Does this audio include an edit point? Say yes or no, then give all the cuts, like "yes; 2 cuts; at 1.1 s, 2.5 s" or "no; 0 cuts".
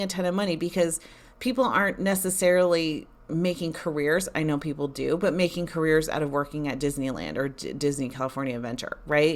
no; 0 cuts